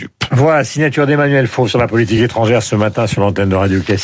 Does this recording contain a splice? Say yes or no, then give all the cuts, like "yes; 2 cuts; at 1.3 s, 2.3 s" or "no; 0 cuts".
no; 0 cuts